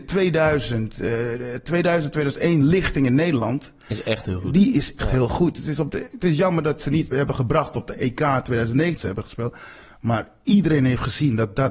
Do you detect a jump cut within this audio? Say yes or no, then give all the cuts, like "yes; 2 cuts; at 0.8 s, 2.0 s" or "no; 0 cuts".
yes; 3 cuts; at 5.0 s, 7.1 s, 9.0 s